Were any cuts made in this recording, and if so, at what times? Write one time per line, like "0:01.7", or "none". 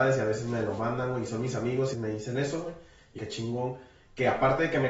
0:01.9
0:03.2